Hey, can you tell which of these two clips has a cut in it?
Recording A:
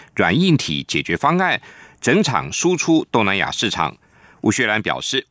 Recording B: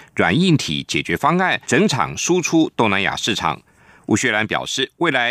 B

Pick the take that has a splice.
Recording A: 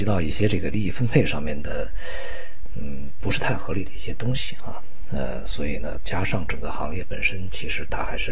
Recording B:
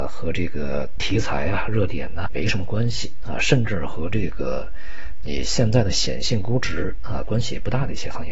B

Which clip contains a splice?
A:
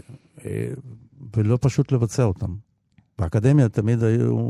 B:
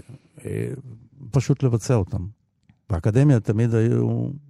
B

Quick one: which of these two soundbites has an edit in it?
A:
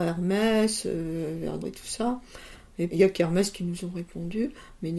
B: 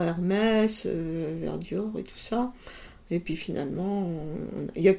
A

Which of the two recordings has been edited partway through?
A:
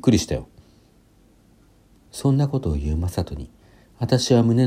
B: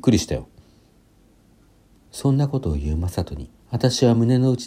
B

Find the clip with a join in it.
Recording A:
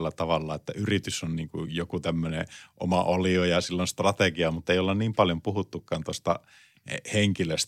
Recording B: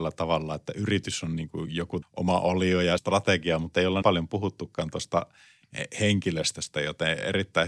B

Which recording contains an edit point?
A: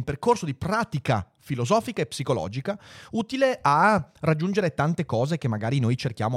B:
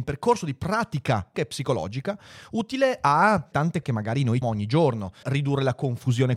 B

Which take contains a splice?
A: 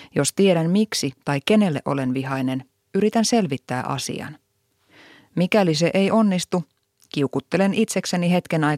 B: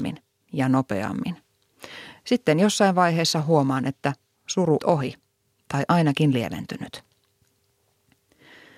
B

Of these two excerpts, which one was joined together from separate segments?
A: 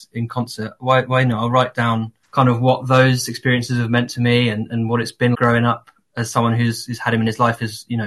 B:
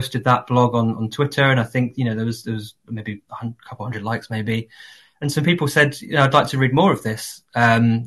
A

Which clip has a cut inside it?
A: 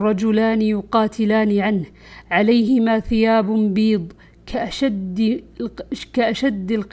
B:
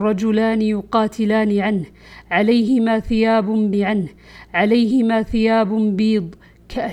B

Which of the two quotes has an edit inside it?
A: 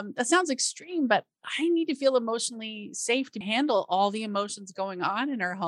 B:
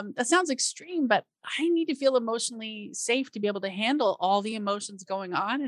A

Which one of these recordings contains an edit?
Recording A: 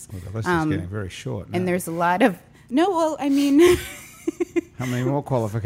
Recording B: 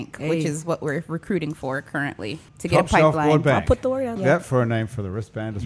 B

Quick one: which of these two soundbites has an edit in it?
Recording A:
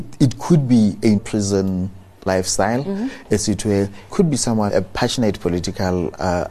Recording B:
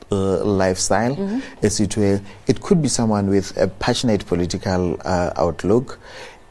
A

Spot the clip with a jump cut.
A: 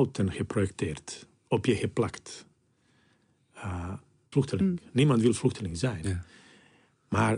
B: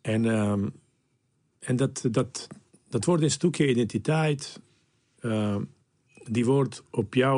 A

